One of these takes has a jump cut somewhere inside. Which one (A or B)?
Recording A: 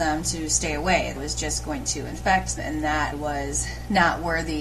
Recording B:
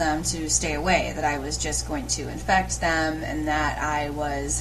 A